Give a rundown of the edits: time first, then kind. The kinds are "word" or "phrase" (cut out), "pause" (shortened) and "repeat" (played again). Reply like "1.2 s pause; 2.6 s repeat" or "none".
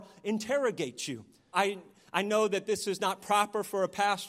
1.5 s word